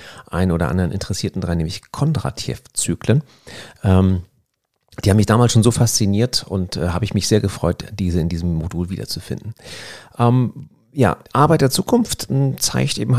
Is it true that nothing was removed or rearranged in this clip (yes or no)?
no